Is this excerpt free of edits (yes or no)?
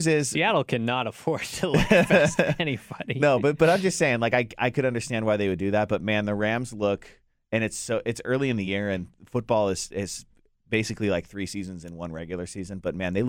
yes